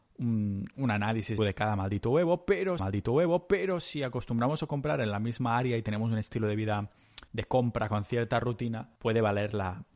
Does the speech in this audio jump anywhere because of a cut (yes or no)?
yes